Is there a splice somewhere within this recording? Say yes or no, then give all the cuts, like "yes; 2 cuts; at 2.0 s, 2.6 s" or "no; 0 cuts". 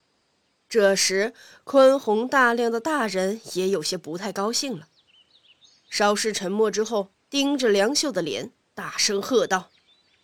yes; 1 cut; at 7.2 s